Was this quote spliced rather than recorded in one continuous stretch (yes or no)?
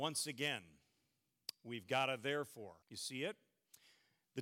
yes